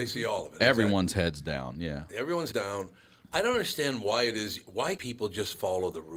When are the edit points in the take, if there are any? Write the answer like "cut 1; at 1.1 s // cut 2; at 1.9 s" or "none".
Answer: cut 1; at 2.5 s // cut 2; at 5.0 s

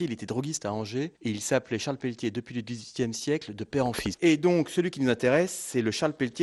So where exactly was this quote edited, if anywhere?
none

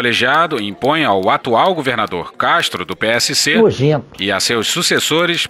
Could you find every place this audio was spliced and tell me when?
cut 1; at 2.3 s

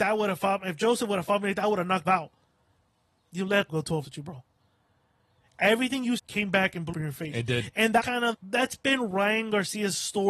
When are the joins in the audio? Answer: cut 1; at 2.0 s // cut 2; at 3.7 s // cut 3; at 4.0 s // cut 4; at 6.2 s // cut 5; at 6.9 s // cut 6; at 8.0 s // cut 7; at 8.3 s

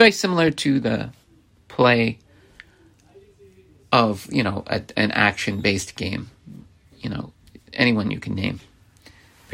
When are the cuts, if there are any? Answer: none

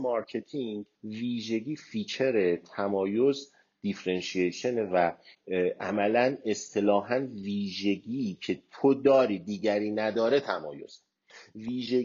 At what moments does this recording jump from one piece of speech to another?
cut 1; at 0.9 s

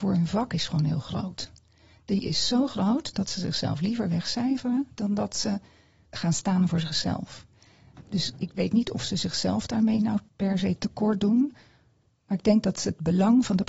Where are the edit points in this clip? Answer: none

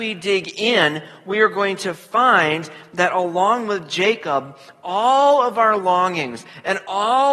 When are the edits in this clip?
none

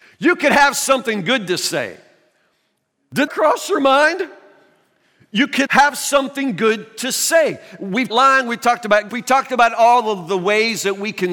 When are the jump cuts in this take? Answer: cut 1; at 3.3 s // cut 2; at 5.7 s // cut 3; at 8.1 s // cut 4; at 9.1 s

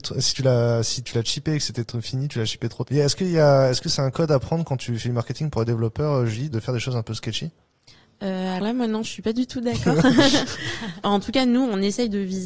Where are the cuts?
cut 1; at 2.8 s // cut 2; at 6.5 s // cut 3; at 8.6 s // cut 4; at 11.0 s

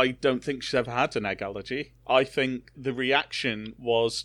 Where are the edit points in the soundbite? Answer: cut 1; at 2.7 s

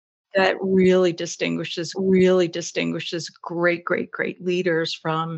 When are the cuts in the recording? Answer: cut 1; at 1.9 s

